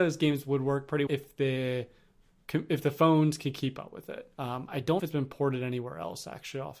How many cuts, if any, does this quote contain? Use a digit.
3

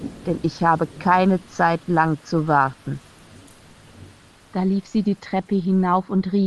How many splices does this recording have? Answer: 0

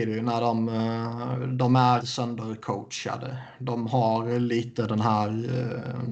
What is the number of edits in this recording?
1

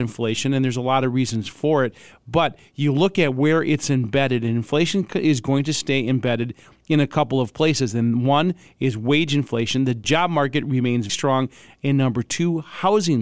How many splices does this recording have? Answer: 1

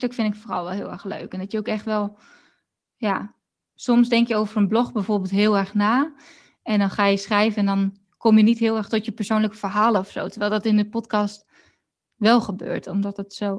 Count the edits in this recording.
0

